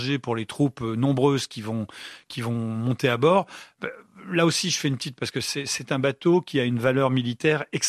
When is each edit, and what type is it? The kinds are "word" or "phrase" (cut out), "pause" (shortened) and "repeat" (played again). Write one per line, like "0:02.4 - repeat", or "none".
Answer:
0:05.2 - word